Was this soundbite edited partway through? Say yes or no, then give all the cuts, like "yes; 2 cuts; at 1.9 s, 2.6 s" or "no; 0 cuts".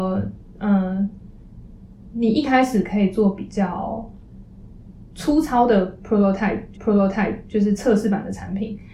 yes; 1 cut; at 6.7 s